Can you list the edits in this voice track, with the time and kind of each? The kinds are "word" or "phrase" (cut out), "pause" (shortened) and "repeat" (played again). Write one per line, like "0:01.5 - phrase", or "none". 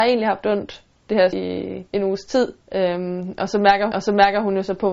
0:01.3 - word
0:01.9 - pause
0:02.6 - pause
0:03.9 - repeat